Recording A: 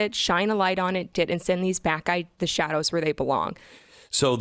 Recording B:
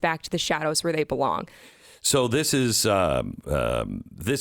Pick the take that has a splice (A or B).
A